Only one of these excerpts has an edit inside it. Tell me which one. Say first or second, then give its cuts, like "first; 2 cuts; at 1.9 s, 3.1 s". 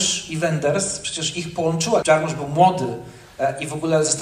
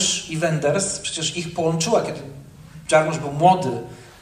first; 1 cut; at 2.0 s